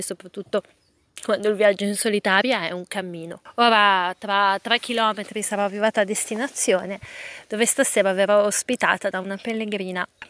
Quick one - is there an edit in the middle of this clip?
no; 0 cuts

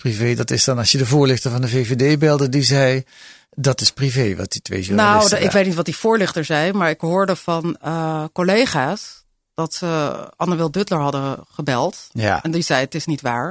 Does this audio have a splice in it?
no; 0 cuts

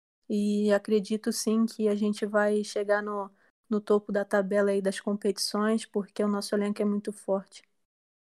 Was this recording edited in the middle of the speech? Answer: no; 0 cuts

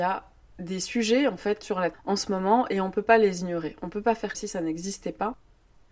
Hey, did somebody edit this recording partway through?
yes; 3 cuts; at 1.6 s, 1.9 s, 4.3 s

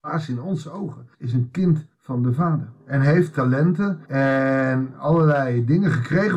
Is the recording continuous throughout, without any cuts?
no; 4 cuts; at 1.1 s, 1.9 s, 2.8 s, 4.0 s

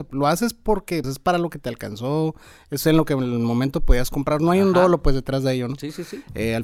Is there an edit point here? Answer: yes; 1 cut; at 1.0 s

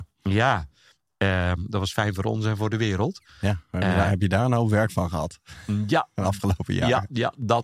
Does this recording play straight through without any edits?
yes; 0 cuts

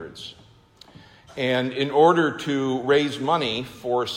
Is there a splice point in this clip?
no; 0 cuts

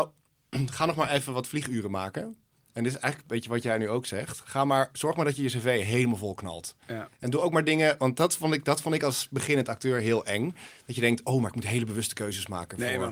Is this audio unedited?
yes; 0 cuts

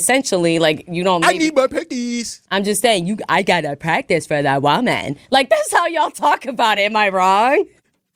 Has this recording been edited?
no; 0 cuts

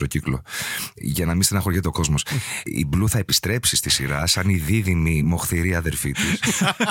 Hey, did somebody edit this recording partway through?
no; 0 cuts

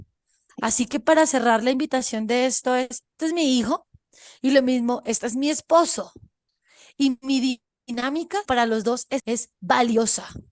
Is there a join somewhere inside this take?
yes; 3 cuts; at 3.2 s, 8.4 s, 9.2 s

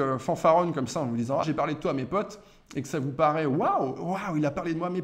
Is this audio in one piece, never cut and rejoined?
no; 1 cut; at 1.4 s

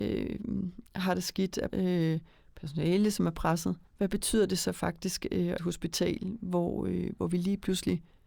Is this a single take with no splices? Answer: no; 3 cuts; at 1.7 s, 3.9 s, 5.6 s

